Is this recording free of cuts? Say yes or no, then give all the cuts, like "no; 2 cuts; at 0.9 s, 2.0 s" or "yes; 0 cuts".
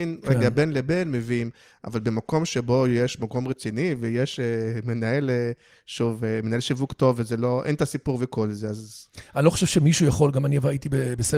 yes; 0 cuts